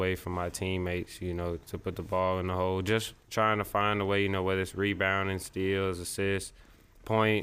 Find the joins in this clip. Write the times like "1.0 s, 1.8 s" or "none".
none